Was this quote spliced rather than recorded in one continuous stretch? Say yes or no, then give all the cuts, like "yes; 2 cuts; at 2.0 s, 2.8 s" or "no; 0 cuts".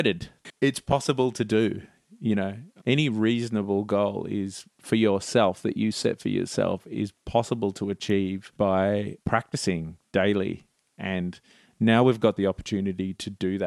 no; 0 cuts